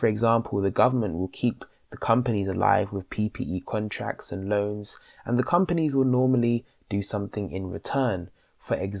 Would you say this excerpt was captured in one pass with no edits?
yes; 0 cuts

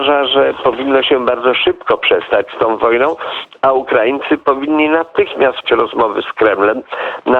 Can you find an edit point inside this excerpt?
yes; 1 cut; at 5.6 s

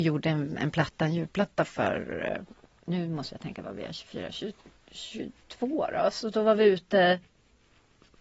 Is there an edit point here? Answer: no; 0 cuts

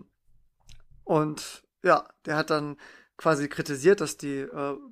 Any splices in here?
no; 0 cuts

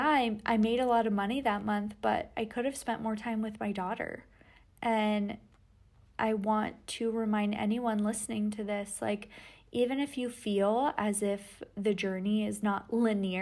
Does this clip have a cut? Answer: no; 0 cuts

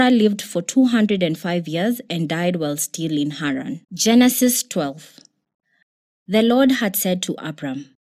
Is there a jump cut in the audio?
yes; 1 cut; at 3.8 s

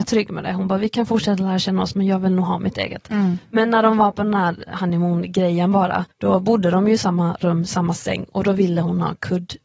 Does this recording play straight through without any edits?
no; 1 cut; at 6.1 s

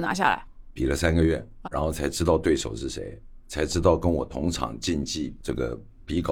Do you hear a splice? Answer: yes; 1 cut; at 1.6 s

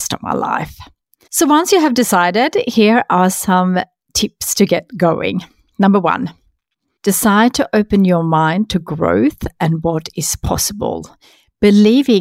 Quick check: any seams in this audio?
no; 0 cuts

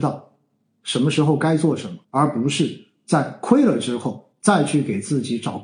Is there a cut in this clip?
yes; 1 cut; at 2.0 s

